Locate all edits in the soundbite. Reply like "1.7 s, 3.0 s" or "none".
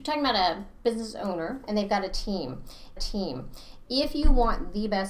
3.0 s